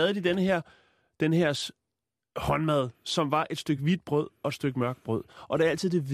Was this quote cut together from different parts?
no; 0 cuts

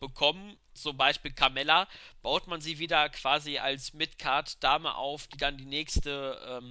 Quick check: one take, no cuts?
yes; 0 cuts

